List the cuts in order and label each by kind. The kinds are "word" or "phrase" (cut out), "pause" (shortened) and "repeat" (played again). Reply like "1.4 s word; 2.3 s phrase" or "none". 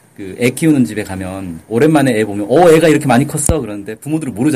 none